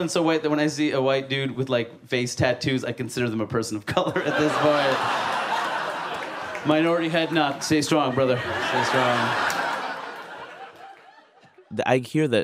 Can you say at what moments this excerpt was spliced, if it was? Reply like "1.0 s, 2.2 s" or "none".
none